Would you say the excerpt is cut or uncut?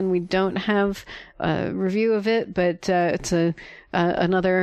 uncut